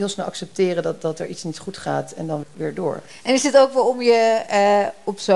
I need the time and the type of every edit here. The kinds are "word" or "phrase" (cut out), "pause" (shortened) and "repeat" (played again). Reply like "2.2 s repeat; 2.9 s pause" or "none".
2.4 s word